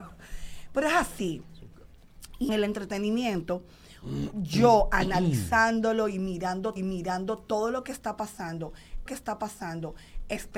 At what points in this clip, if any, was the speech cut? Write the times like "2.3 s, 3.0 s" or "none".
2.5 s, 6.8 s, 9.1 s